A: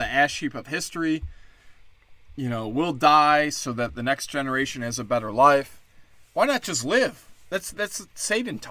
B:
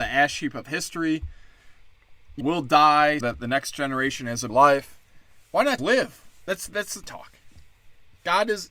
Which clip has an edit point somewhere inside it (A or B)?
B